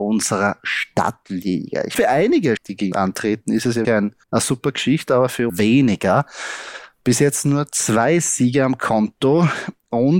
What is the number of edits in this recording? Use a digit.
6